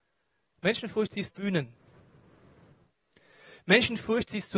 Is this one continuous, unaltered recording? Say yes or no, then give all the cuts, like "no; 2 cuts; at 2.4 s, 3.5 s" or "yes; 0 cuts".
no; 1 cut; at 1.3 s